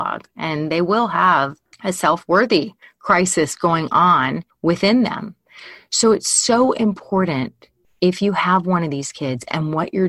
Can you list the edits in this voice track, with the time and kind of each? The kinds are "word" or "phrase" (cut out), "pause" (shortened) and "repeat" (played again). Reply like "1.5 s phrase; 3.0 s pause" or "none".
1.7 s pause; 2.8 s pause; 4.5 s pause